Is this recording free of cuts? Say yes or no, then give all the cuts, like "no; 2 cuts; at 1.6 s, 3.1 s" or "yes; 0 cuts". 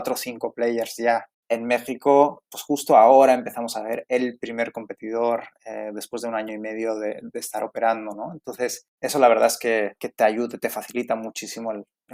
no; 3 cuts; at 1.3 s, 8.9 s, 10.0 s